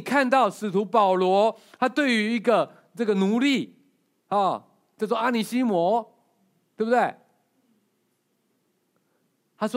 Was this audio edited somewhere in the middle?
no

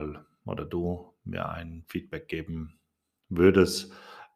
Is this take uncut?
yes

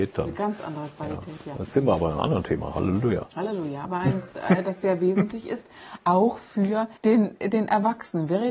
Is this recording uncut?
no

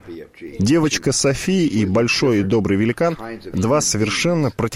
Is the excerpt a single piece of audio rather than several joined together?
yes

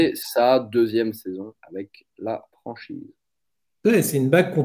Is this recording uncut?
no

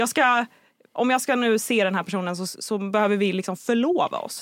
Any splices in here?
no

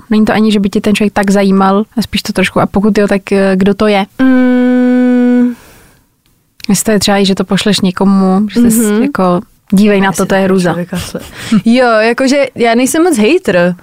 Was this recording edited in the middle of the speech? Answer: yes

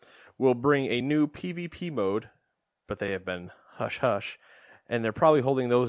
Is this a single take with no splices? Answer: yes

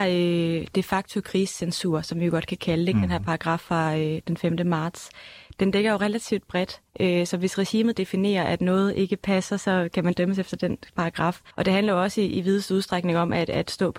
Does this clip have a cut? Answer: yes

